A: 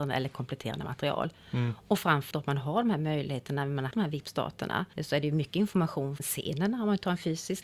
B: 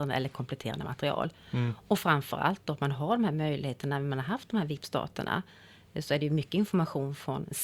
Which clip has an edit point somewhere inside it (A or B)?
A